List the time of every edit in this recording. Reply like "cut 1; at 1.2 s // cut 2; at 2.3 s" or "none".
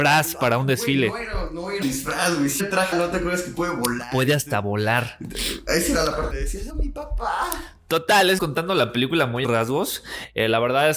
cut 1; at 1.8 s // cut 2; at 2.6 s // cut 3; at 2.9 s // cut 4; at 6.3 s // cut 5; at 6.7 s // cut 6; at 8.4 s // cut 7; at 9.4 s